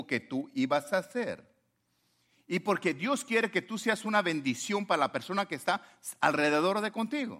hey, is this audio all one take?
yes; 0 cuts

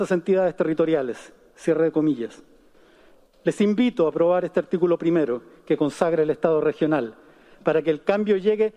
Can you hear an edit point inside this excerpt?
no; 0 cuts

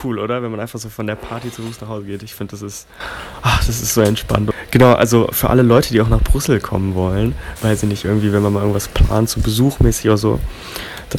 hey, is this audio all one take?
no; 1 cut; at 7.6 s

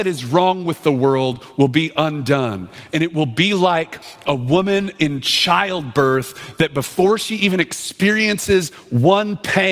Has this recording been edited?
no; 0 cuts

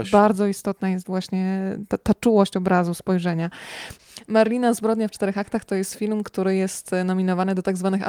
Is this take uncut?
yes; 0 cuts

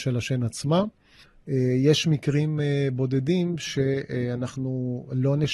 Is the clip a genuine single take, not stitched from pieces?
yes; 0 cuts

